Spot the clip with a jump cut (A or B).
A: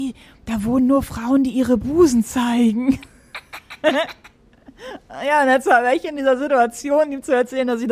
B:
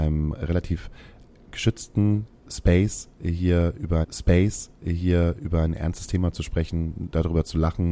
B